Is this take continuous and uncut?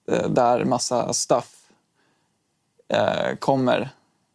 yes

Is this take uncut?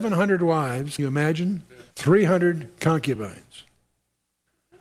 no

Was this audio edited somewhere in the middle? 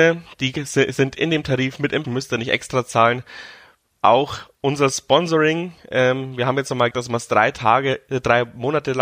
yes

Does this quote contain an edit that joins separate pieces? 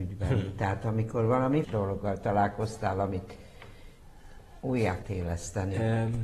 yes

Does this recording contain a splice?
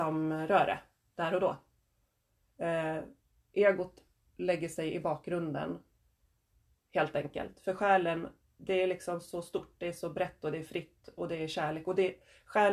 no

